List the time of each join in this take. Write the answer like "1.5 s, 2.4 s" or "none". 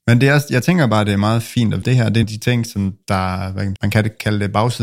1.8 s, 2.2 s, 3.8 s